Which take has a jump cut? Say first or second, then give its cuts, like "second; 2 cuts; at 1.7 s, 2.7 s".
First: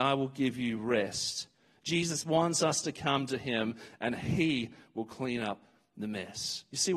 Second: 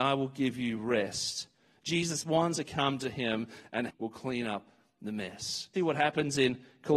second; 3 cuts; at 2.5 s, 3.9 s, 5.8 s